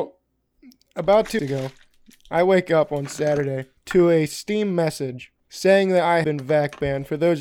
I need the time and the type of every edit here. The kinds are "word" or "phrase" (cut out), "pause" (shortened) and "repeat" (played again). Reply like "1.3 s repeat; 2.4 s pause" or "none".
1.4 s word; 3.8 s pause; 5.4 s pause; 6.2 s word